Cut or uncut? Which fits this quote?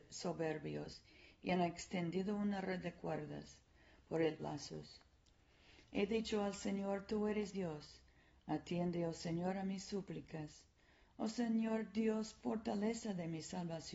cut